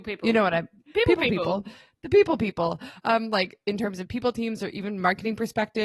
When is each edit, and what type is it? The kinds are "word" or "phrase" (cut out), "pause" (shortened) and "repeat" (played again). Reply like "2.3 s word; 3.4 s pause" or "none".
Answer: none